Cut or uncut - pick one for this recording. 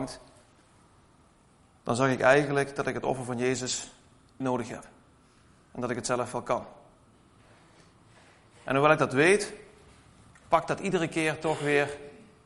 cut